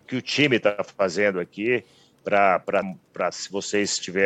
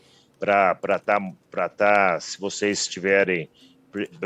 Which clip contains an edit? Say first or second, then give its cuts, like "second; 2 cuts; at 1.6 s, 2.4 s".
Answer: first; 2 cuts; at 2.8 s, 3.3 s